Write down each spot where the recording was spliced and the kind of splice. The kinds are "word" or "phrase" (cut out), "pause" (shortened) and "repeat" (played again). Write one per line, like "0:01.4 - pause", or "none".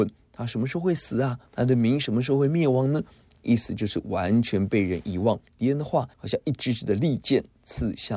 0:01.5 - pause
0:05.5 - pause
0:06.1 - pause